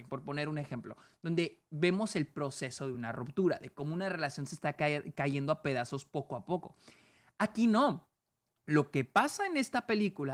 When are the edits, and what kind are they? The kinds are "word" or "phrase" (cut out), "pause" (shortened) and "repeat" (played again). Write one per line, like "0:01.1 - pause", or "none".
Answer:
none